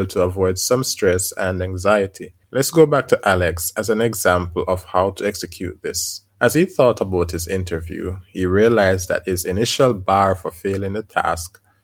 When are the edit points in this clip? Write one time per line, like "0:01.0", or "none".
0:02.4
0:06.3